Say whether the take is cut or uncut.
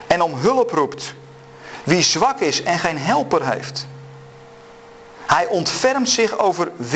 uncut